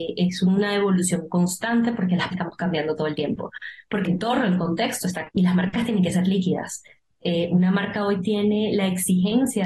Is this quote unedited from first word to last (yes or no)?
no